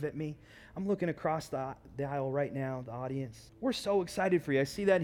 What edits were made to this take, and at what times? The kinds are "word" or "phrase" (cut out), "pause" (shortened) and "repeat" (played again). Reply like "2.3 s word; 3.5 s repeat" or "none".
3.5 s pause